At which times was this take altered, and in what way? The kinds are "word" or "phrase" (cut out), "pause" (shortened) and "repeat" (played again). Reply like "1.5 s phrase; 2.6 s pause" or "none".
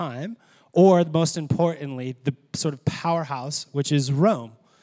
none